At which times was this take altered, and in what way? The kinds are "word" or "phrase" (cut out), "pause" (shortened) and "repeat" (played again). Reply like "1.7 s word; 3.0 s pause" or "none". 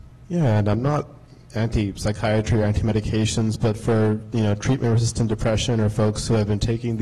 none